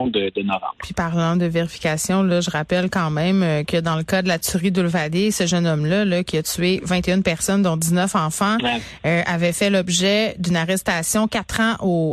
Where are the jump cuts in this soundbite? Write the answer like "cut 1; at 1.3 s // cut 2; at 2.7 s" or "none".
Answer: none